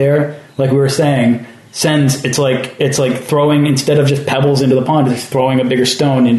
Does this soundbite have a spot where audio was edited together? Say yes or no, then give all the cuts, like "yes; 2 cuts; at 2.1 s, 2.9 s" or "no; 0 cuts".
no; 0 cuts